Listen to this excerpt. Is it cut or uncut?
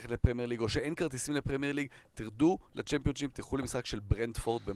uncut